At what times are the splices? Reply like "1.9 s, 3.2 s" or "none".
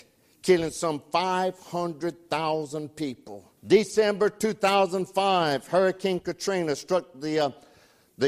3.6 s